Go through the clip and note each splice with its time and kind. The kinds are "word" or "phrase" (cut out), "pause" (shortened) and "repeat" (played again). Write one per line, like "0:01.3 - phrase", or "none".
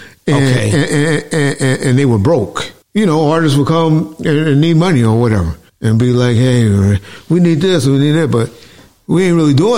0:02.8 - pause
0:05.7 - pause